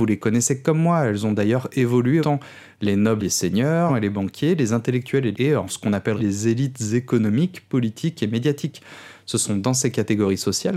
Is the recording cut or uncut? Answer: cut